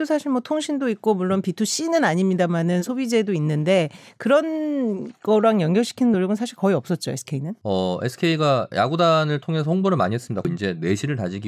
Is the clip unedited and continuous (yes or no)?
yes